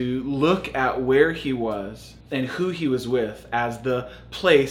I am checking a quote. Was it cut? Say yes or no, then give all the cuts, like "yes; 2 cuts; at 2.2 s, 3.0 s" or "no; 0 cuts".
yes; 1 cut; at 2.2 s